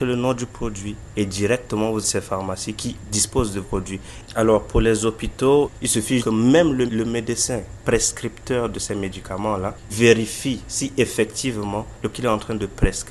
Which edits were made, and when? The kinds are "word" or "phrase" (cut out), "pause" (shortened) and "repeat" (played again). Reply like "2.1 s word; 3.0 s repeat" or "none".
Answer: 2.0 s word; 3.6 s word; 6.2 s word; 6.9 s word; 9.9 s word; 12.1 s word